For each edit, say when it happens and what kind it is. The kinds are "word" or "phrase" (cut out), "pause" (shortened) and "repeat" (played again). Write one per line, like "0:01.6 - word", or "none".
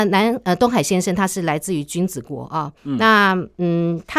0:02.8 - pause